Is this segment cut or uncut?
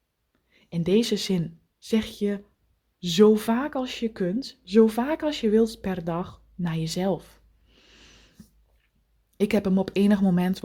uncut